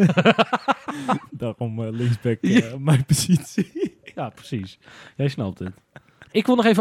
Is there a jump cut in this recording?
no; 0 cuts

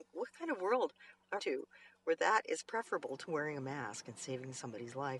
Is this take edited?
yes; 1 cut; at 1.4 s

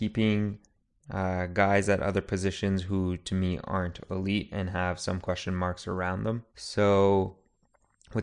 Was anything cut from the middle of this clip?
yes; 1 cut; at 6.5 s

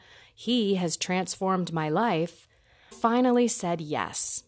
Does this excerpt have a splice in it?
yes; 1 cut; at 2.9 s

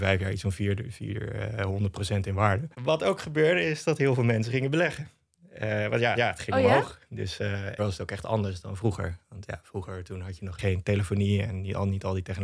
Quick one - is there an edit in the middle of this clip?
yes; 3 cuts; at 2.7 s, 6.2 s, 7.8 s

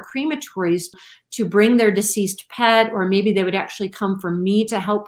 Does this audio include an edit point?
no; 0 cuts

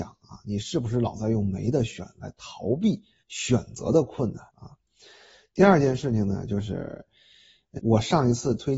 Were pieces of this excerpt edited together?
yes; 3 cuts; at 3.2 s, 4.5 s, 7.8 s

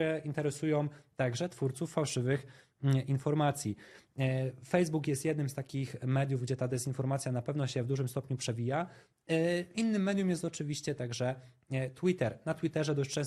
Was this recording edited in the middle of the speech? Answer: no; 0 cuts

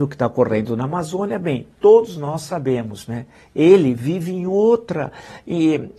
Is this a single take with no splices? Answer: yes; 0 cuts

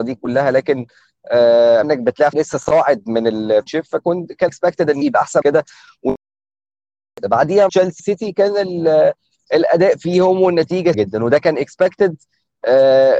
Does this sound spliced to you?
yes; 9 cuts; at 1.8 s, 2.3 s, 3.7 s, 4.5 s, 5.0 s, 5.4 s, 7.7 s, 8.0 s, 10.9 s

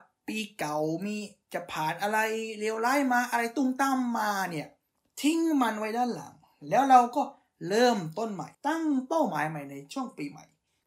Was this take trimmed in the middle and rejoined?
yes; 1 cut; at 8.5 s

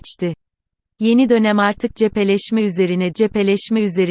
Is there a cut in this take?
yes; 1 cut; at 3.1 s

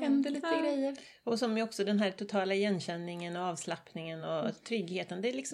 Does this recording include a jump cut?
no; 0 cuts

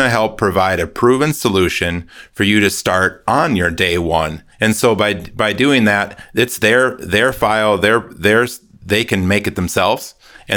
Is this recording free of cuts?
no; 1 cut; at 4.5 s

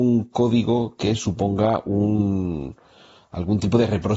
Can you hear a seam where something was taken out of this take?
no; 0 cuts

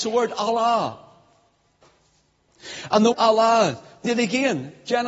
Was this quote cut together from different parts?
yes; 2 cuts; at 3.1 s, 4.1 s

